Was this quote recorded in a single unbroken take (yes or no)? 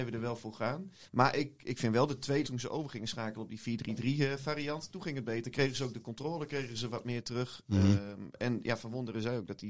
no